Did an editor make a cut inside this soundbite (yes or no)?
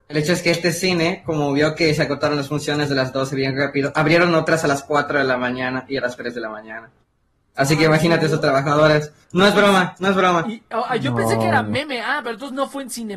no